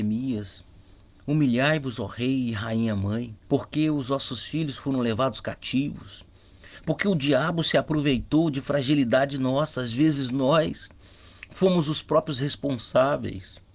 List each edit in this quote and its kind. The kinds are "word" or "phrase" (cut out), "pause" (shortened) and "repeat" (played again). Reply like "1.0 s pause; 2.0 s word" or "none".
3.4 s pause